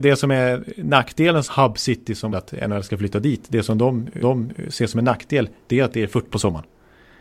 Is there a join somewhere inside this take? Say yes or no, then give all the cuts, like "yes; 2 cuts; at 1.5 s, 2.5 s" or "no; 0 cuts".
yes; 5 cuts; at 1.5 s, 2.3 s, 4.2 s, 5.7 s, 6.3 s